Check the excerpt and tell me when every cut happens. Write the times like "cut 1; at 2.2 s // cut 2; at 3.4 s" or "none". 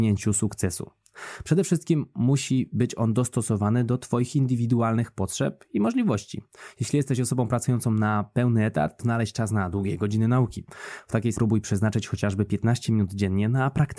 cut 1; at 9.0 s // cut 2; at 11.3 s